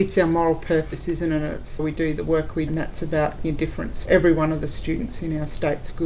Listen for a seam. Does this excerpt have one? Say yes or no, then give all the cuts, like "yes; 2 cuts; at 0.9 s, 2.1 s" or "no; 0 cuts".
yes; 4 cuts; at 1.8 s, 2.7 s, 3.4 s, 4.0 s